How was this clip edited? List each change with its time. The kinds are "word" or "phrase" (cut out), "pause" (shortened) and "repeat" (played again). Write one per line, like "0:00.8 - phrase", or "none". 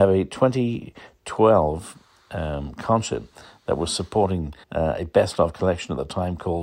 0:04.6 - pause